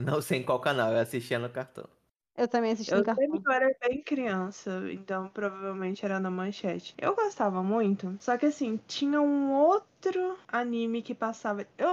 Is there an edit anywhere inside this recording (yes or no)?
no